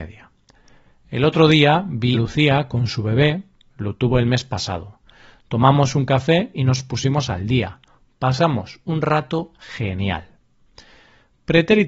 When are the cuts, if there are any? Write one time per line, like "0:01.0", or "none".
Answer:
0:02.1